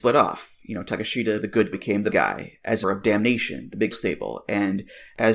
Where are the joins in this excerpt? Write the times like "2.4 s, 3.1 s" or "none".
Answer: 1.4 s, 1.7 s, 2.1 s, 2.8 s, 3.9 s